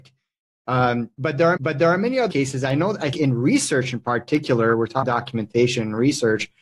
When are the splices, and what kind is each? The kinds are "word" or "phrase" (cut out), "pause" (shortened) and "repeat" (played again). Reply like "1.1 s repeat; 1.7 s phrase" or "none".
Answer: 1.6 s repeat; 2.3 s word; 3.1 s word; 5.0 s word